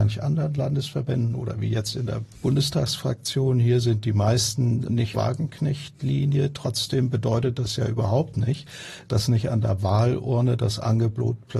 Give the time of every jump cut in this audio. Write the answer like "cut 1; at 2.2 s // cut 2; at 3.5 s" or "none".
cut 1; at 5.1 s